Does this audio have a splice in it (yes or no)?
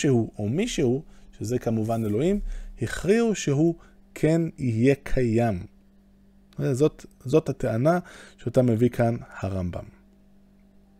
no